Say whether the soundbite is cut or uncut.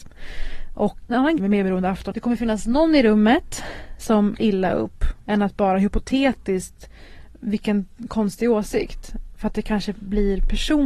cut